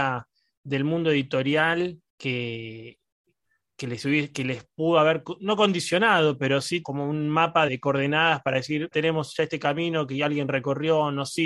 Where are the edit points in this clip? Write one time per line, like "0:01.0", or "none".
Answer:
0:02.1
0:06.8
0:07.7
0:08.9